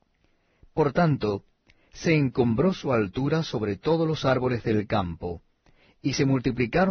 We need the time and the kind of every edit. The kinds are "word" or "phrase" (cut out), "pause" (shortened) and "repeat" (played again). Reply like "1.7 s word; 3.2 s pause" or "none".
none